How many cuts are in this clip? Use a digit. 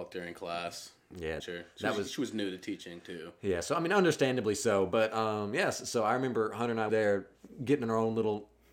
2